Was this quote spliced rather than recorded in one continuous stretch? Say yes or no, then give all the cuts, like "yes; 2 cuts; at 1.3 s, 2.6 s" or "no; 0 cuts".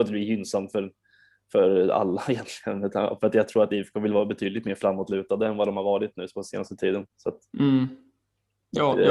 no; 0 cuts